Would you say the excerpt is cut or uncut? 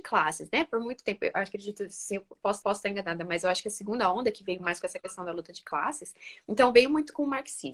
cut